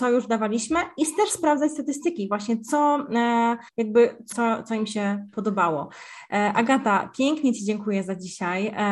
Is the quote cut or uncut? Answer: cut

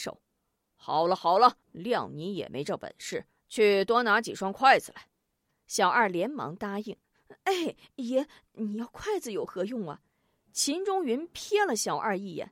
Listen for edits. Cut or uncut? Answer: cut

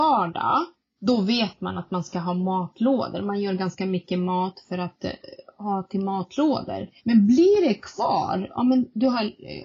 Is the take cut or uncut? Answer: cut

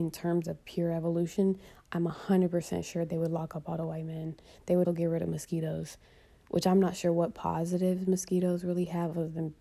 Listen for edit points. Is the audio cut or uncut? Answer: cut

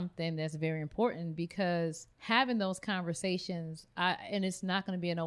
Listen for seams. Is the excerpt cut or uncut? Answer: cut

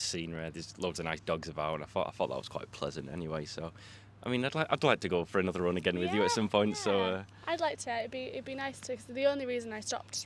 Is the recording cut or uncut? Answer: uncut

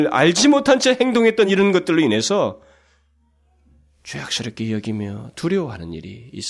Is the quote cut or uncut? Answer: uncut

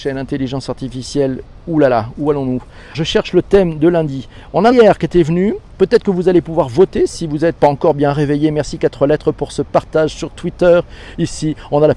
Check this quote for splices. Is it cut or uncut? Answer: cut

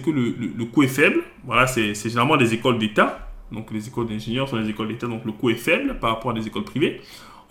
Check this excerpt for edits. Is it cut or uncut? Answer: uncut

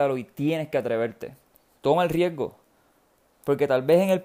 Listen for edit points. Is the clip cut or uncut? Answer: cut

